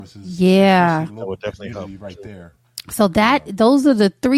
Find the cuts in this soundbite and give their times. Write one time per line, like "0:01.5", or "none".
0:01.1